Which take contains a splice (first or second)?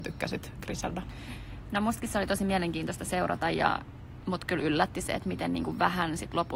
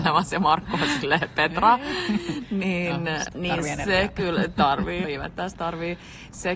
second